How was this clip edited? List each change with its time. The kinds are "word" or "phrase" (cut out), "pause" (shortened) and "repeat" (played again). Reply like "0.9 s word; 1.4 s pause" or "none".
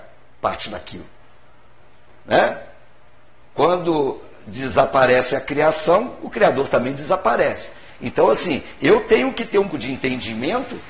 9.7 s word